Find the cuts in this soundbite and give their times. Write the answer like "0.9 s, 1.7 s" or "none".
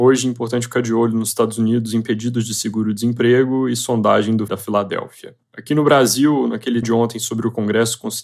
4.5 s, 5.4 s, 6.8 s